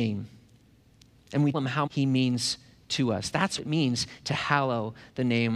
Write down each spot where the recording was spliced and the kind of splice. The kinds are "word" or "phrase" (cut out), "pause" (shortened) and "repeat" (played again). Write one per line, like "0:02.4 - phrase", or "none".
0:01.5 - word
0:01.9 - word
0:03.6 - word